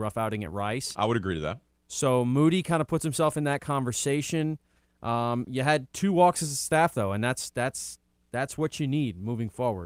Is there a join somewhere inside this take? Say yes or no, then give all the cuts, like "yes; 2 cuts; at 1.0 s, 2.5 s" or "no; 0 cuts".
no; 0 cuts